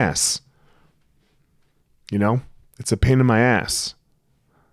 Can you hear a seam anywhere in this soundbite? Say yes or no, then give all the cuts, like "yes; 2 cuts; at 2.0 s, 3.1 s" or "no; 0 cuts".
no; 0 cuts